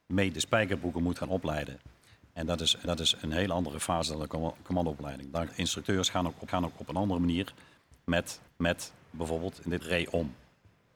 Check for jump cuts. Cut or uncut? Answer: cut